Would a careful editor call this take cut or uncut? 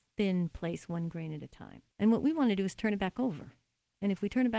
cut